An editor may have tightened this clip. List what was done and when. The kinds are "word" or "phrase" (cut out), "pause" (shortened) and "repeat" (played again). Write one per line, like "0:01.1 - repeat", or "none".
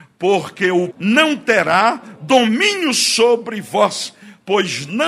0:00.9 - word